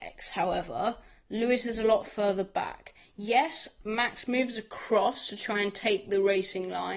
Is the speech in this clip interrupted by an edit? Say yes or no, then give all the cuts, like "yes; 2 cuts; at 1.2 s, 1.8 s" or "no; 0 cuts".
no; 0 cuts